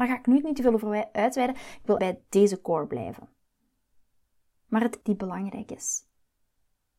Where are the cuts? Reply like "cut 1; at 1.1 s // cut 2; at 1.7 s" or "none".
cut 1; at 2.0 s // cut 2; at 5.0 s